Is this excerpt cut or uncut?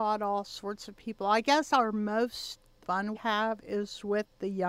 cut